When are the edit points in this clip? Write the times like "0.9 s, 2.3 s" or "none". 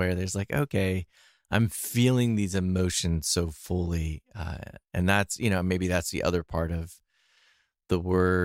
none